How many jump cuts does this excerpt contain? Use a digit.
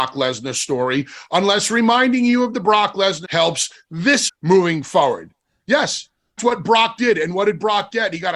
3